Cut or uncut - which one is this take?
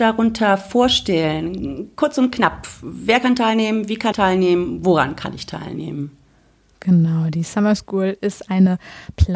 cut